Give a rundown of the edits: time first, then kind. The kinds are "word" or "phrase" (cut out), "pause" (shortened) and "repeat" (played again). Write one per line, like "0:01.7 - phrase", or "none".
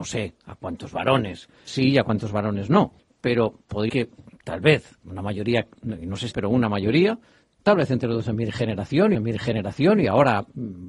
0:01.7 - word
0:03.0 - pause
0:03.9 - word
0:05.0 - pause
0:06.3 - phrase
0:09.1 - repeat